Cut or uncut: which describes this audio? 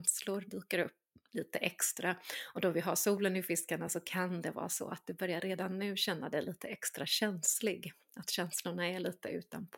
uncut